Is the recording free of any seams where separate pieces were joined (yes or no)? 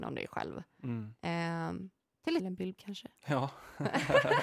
no